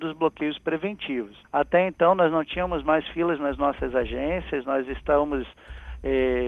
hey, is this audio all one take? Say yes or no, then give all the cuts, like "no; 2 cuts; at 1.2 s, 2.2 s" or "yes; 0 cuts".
no; 1 cut; at 1.4 s